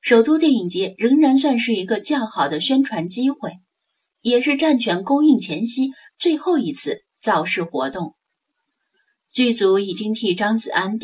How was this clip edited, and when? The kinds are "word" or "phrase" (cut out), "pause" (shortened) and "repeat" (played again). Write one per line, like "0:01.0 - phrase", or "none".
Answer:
none